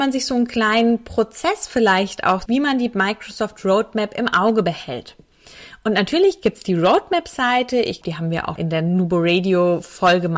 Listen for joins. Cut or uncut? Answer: cut